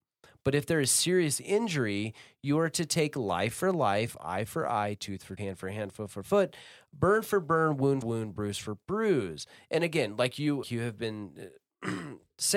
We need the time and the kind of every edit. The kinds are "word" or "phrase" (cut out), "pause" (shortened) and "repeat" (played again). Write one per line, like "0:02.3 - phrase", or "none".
0:05.4 - word
0:08.0 - word
0:10.6 - word